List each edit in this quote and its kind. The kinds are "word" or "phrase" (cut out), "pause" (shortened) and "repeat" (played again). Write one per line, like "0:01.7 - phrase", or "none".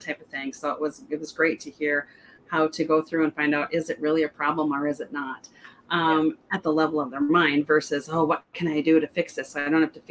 none